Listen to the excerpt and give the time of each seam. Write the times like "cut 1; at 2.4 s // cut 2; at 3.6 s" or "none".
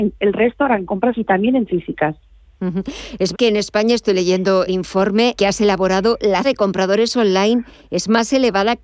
cut 1; at 1.1 s // cut 2; at 1.7 s // cut 3; at 3.3 s // cut 4; at 4.7 s // cut 5; at 5.3 s // cut 6; at 6.4 s

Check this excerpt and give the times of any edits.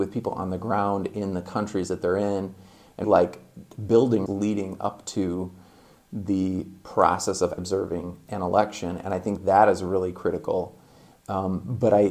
cut 1; at 3.0 s // cut 2; at 4.3 s // cut 3; at 7.6 s

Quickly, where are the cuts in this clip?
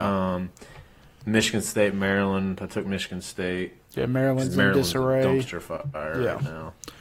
cut 1; at 3.8 s

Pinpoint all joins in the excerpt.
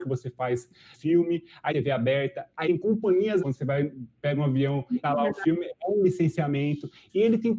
cut 1; at 0.9 s // cut 2; at 1.7 s // cut 3; at 2.6 s // cut 4; at 3.4 s // cut 5; at 5.0 s

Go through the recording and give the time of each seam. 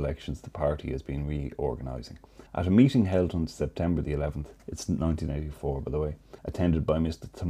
cut 1; at 2.5 s // cut 2; at 4.6 s // cut 3; at 6.4 s

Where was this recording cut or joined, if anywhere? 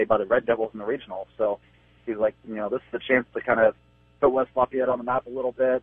none

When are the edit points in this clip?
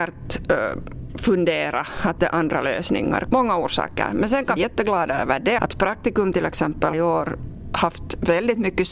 cut 1; at 2.2 s // cut 2; at 4.6 s // cut 3; at 5.6 s // cut 4; at 6.9 s

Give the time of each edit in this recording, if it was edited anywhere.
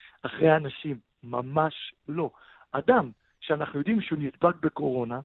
none

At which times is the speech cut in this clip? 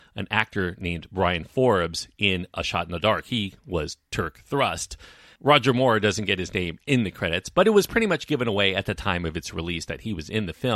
none

